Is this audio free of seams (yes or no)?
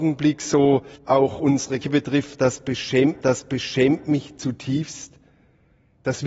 no